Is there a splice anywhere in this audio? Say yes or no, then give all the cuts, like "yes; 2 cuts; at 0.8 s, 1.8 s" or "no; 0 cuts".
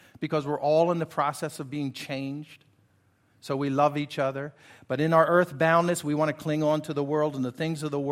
no; 0 cuts